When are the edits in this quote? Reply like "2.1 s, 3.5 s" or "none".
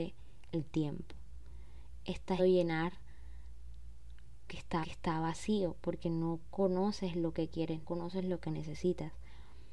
2.4 s, 4.5 s, 4.8 s, 7.8 s

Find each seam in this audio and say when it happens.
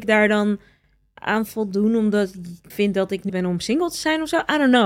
2.7 s, 3.3 s

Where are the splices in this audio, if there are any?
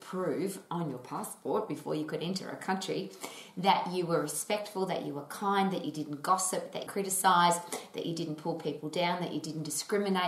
6.9 s

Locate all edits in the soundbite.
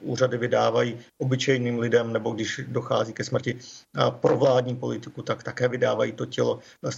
1.1 s

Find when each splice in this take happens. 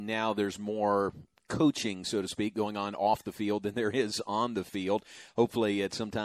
none

